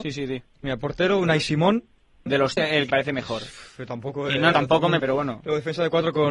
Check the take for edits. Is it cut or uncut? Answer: cut